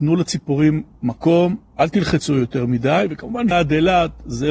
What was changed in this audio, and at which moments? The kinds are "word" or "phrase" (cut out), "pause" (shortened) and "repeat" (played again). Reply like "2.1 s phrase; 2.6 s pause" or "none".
1.7 s pause; 3.5 s word

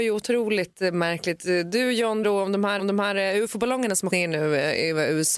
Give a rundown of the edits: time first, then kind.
2.2 s word; 2.8 s repeat; 4.1 s word

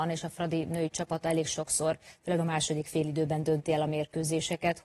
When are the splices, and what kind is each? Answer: none

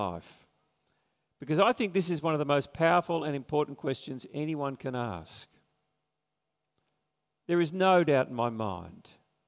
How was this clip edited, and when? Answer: none

